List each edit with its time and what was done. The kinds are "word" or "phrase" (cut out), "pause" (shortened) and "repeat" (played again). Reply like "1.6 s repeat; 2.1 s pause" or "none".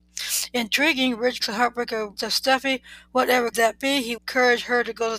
1.4 s word; 2.2 s word; 3.5 s word; 4.2 s word